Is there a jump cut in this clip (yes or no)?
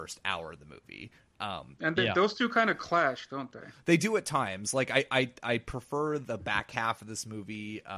no